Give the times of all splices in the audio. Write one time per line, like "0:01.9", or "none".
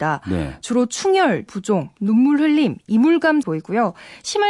0:01.5
0:01.9
0:03.4